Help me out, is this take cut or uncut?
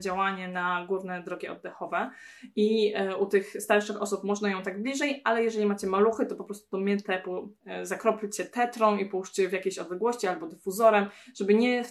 uncut